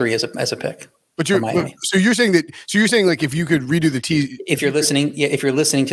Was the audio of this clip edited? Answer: no; 0 cuts

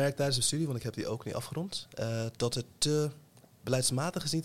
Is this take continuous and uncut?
yes; 0 cuts

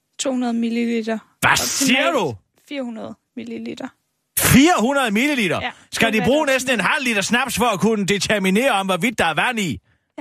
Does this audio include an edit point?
no; 0 cuts

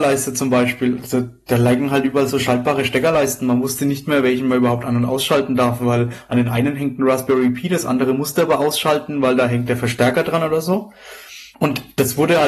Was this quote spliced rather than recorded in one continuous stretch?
yes; 1 cut; at 11.5 s

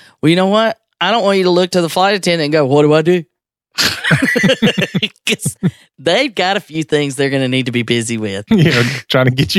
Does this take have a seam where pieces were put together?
no; 0 cuts

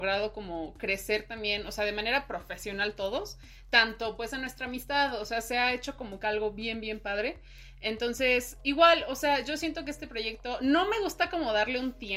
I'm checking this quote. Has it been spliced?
no; 0 cuts

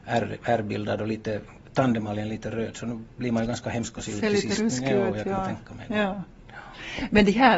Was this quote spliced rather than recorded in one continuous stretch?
no; 0 cuts

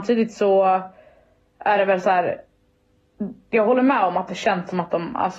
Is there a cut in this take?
no; 0 cuts

